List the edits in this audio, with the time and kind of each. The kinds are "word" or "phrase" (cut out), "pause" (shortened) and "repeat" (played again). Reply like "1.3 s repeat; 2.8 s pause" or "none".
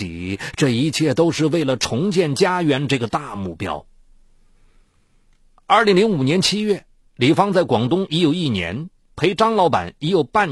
none